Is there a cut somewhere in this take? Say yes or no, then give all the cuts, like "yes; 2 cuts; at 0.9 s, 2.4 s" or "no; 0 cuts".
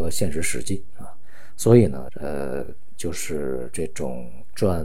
yes; 1 cut; at 2.1 s